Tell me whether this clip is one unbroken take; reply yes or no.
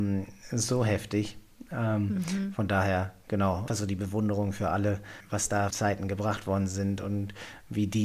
no